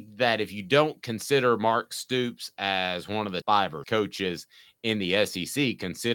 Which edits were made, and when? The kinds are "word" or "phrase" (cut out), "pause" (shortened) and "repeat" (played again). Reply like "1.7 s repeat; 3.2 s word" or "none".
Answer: 3.4 s word; 3.8 s word